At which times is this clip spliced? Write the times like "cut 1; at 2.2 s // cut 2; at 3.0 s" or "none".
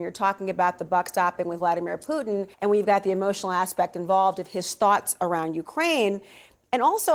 cut 1; at 2.5 s